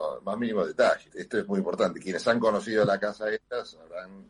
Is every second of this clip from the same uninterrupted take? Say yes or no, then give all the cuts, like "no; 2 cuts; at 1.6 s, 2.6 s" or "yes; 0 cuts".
yes; 0 cuts